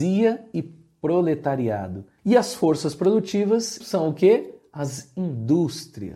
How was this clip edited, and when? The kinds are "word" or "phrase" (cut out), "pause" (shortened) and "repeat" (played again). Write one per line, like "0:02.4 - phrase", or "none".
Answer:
0:03.8 - word